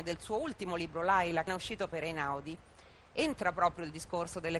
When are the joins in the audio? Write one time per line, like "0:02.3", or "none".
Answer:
0:01.5